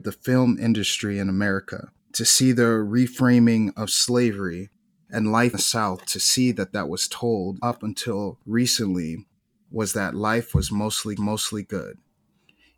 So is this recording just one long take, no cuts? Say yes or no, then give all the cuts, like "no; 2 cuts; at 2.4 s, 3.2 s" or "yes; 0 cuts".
no; 6 cuts; at 2.0 s, 5.5 s, 6.7 s, 7.6 s, 8.4 s, 11.2 s